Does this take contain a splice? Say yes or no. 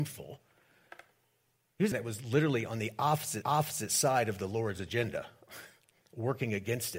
yes